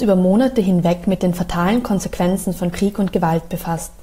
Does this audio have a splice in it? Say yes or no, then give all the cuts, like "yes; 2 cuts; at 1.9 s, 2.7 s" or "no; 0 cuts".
no; 0 cuts